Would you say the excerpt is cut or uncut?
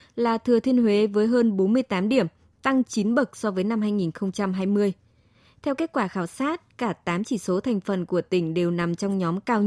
uncut